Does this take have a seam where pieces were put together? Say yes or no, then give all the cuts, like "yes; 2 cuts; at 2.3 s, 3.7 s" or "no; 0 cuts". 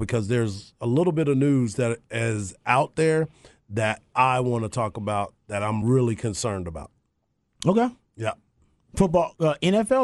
no; 0 cuts